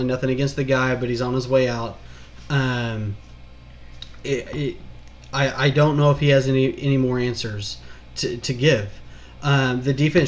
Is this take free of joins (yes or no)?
yes